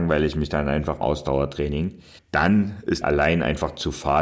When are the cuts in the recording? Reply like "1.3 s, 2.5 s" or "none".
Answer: 1.0 s, 2.2 s, 3.0 s